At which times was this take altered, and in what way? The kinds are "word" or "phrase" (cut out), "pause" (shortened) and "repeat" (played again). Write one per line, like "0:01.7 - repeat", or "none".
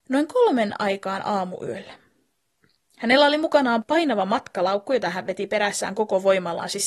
none